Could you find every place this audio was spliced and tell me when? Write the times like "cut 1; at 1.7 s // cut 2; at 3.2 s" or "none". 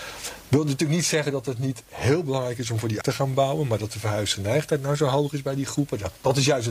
cut 1; at 3.0 s